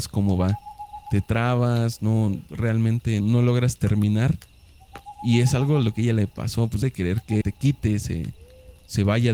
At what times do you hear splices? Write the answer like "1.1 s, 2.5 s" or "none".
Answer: 3.2 s, 6.8 s, 7.4 s